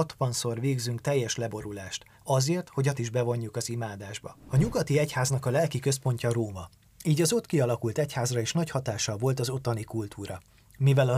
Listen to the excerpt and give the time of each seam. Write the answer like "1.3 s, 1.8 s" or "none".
2.9 s